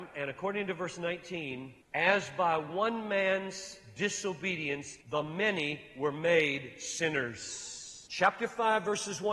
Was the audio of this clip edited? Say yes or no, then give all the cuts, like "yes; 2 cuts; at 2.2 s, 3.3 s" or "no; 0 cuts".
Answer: yes; 3 cuts; at 1.8 s, 5.0 s, 8.1 s